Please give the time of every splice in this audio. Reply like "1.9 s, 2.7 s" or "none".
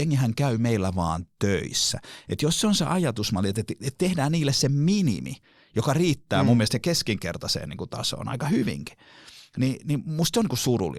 none